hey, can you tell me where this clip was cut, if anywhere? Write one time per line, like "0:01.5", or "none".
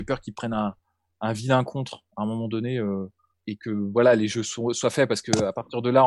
0:03.3

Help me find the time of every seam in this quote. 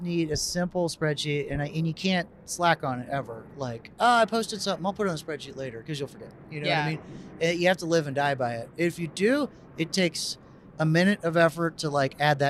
0:03.9

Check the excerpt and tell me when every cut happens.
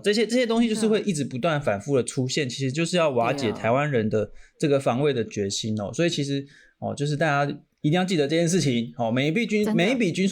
none

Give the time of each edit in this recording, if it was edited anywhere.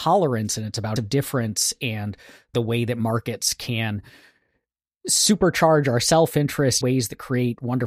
0:01.0
0:02.5
0:06.8

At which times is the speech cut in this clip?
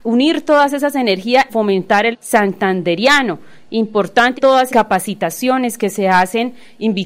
0:01.5
0:02.1
0:04.4
0:04.7

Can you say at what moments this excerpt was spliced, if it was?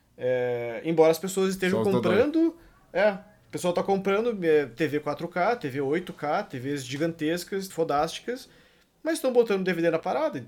0:07.7

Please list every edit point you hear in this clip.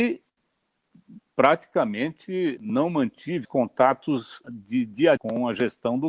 0:02.6
0:03.4
0:04.4
0:05.2

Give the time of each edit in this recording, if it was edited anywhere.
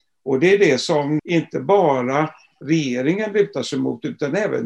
0:01.2

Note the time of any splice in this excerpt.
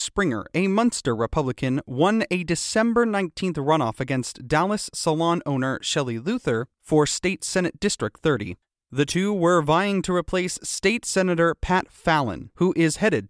0:06.7
0:08.6

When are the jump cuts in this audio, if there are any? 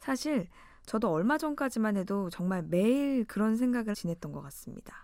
0:03.9

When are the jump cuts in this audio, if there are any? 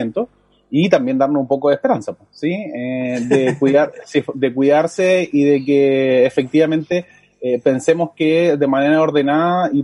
none

